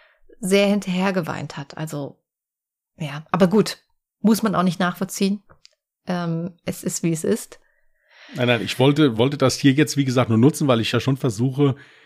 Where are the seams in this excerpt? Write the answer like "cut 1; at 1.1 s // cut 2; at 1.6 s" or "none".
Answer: none